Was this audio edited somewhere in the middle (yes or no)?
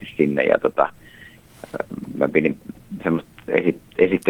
no